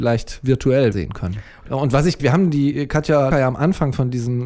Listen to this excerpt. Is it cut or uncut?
cut